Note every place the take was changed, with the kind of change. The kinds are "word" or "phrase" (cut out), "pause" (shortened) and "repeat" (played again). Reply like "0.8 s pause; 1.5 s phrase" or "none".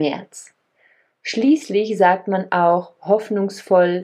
none